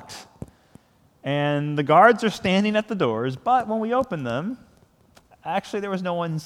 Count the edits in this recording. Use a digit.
0